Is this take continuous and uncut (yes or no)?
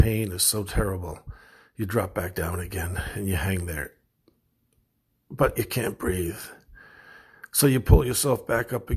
yes